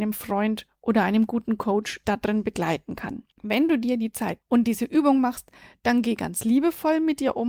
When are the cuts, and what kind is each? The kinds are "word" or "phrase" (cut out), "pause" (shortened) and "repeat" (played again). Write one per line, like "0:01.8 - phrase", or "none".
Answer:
0:02.0 - phrase
0:03.3 - pause
0:04.4 - word